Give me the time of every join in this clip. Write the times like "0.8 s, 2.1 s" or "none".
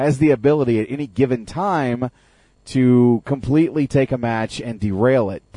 none